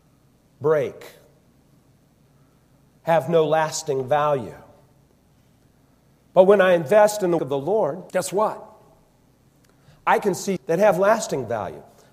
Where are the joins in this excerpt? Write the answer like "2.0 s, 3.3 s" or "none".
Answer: 7.4 s, 8.1 s, 10.6 s